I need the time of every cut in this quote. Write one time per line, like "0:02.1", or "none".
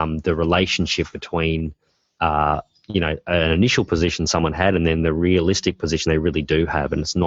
none